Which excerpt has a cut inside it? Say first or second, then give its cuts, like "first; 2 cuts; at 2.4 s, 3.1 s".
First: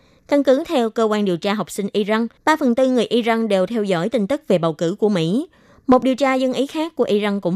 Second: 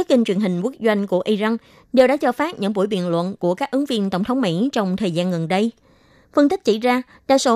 first; 1 cut; at 2.4 s